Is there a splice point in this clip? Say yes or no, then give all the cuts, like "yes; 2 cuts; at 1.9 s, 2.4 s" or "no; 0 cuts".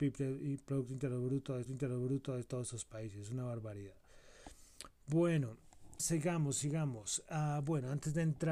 yes; 2 cuts; at 1.7 s, 6.0 s